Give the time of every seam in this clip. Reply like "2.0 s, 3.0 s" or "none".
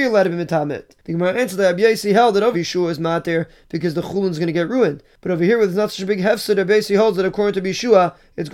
2.5 s